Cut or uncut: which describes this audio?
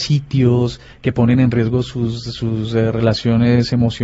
uncut